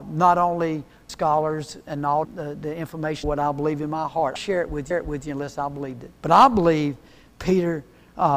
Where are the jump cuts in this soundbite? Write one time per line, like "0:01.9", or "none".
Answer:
0:01.1
0:02.2
0:03.2
0:04.4
0:04.9
0:06.1